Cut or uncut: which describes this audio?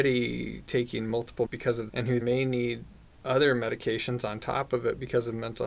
cut